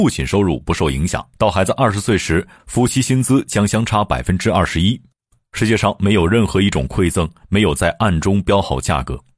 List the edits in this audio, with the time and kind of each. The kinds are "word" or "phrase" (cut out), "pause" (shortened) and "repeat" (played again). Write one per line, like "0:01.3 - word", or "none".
0:01.3 - pause